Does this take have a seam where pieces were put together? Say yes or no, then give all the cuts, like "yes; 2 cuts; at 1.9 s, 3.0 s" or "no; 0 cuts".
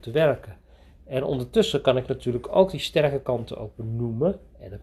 no; 0 cuts